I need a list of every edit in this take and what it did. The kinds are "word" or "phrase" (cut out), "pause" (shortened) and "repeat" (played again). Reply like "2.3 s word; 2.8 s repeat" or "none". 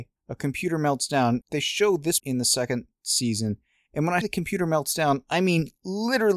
1.4 s word; 2.2 s word; 4.2 s word